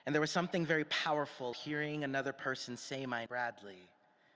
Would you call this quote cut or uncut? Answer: cut